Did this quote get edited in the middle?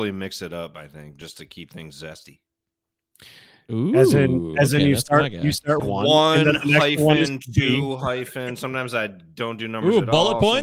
yes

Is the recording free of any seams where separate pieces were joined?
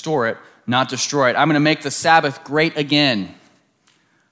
yes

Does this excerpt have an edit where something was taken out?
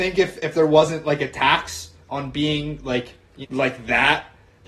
yes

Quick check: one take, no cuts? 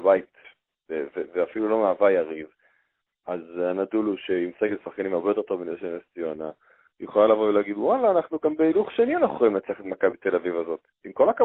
yes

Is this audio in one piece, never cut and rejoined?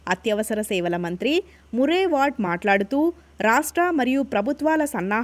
yes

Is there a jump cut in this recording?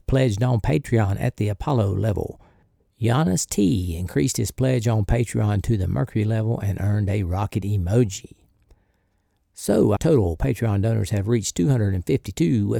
yes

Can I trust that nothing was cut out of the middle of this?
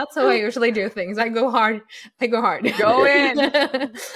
yes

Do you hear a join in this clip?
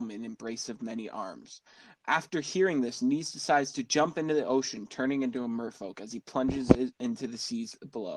no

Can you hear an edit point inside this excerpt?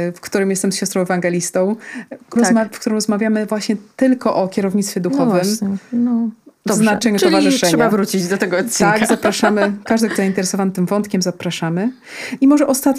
yes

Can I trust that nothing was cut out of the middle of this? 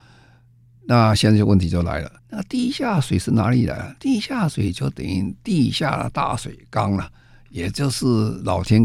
no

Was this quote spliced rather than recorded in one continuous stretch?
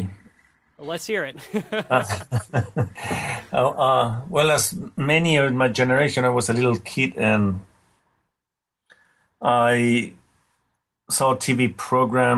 no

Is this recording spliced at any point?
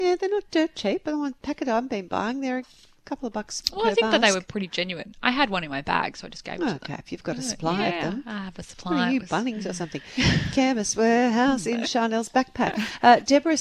no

